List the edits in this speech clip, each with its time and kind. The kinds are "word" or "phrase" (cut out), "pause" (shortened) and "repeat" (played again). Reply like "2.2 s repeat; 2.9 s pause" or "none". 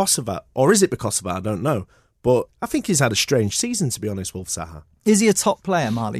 2.5 s word